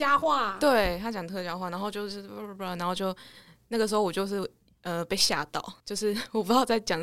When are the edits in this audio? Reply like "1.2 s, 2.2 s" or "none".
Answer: 5.8 s